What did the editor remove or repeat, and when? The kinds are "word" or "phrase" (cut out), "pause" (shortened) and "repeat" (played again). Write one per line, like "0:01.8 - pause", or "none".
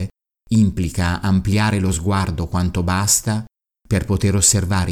none